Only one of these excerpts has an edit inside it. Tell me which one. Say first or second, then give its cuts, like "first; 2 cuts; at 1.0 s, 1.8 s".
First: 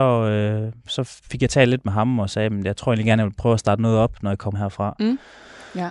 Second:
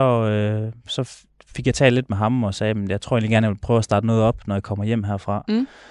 first; 2 cuts; at 1.2 s, 4.5 s